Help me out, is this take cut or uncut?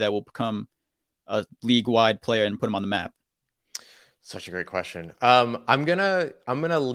uncut